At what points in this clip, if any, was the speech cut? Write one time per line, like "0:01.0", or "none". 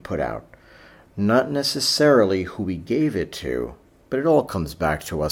none